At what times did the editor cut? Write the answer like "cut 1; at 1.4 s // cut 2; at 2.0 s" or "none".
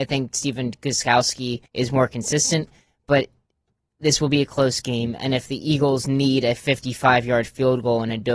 cut 1; at 1.7 s